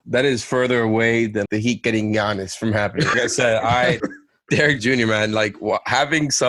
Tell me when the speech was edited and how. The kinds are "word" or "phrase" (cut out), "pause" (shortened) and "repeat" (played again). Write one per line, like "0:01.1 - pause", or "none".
0:01.5 - word
0:03.1 - word
0:04.0 - word
0:04.8 - word